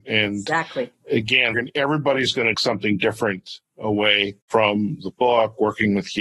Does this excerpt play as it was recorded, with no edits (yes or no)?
no